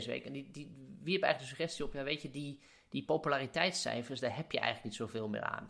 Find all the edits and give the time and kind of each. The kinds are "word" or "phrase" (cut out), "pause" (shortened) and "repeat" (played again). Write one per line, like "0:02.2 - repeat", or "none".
none